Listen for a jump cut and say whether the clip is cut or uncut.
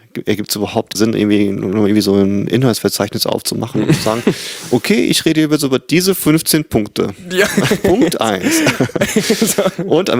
cut